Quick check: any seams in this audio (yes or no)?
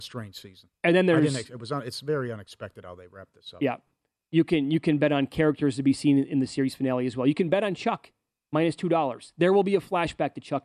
no